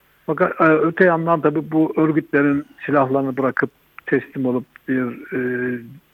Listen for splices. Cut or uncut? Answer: uncut